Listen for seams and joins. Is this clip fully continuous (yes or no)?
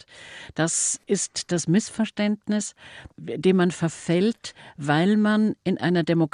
yes